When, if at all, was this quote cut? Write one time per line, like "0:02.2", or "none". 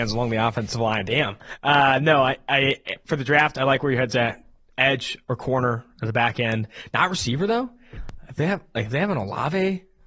none